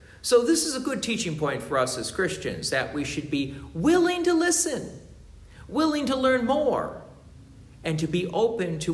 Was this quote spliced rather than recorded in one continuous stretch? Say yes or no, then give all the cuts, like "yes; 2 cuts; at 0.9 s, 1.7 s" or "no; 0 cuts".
no; 0 cuts